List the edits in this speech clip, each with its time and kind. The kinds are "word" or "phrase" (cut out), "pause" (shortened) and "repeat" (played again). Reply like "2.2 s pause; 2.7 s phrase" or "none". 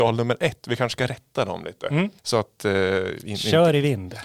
2.2 s pause